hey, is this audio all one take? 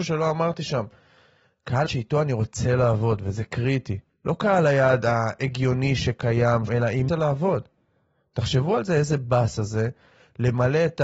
no; 4 cuts; at 1.9 s, 4.1 s, 6.7 s, 7.1 s

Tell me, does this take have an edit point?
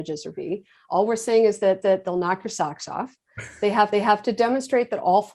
yes; 2 cuts; at 1.8 s, 3.9 s

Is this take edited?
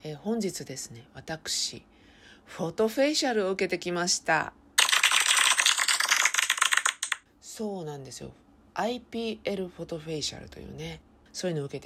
no; 0 cuts

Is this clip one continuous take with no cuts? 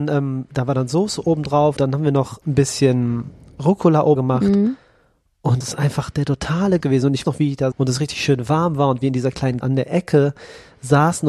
no; 8 cuts; at 1.8 s, 2.4 s, 4.2 s, 5.6 s, 6.8 s, 7.2 s, 7.7 s, 9.6 s

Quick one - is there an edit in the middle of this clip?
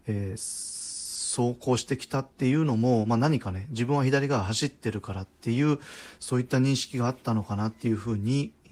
no; 0 cuts

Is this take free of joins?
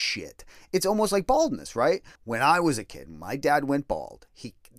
no; 1 cut; at 2.2 s

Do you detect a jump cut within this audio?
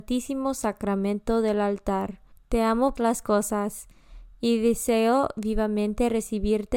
yes; 2 cuts; at 2.3 s, 3.0 s

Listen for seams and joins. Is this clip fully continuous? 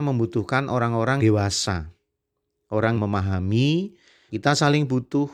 no; 3 cuts; at 1.2 s, 2.9 s, 4.3 s

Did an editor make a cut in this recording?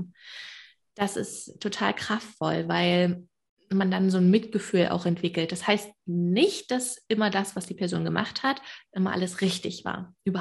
no; 0 cuts

